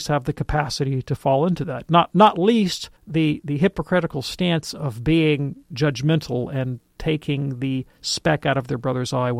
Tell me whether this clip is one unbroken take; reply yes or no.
no